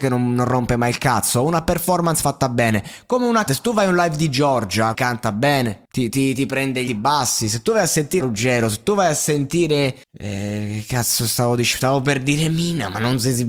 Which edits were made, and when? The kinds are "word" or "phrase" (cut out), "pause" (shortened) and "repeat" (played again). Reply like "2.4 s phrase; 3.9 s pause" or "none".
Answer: 3.5 s word; 4.9 s phrase; 5.8 s pause; 6.9 s word; 8.2 s word; 10.0 s pause